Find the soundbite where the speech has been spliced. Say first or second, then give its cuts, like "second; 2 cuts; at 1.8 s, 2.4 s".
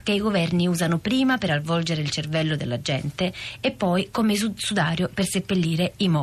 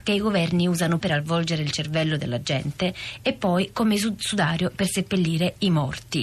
second; 1 cut; at 1.0 s